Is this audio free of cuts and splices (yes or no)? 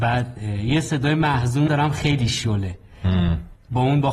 no